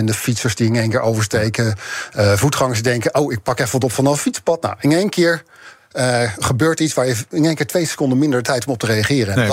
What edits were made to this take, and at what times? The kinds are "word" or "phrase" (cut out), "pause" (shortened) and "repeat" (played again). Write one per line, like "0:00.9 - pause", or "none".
none